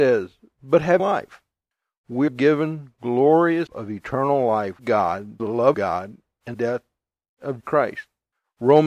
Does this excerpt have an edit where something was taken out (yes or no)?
yes